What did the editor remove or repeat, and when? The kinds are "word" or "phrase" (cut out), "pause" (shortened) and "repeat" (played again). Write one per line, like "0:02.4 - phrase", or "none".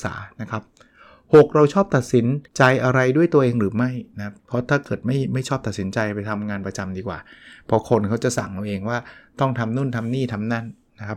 0:02.5 - pause
0:04.4 - pause